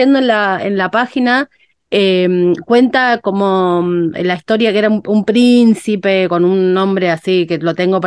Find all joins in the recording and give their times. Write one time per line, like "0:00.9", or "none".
none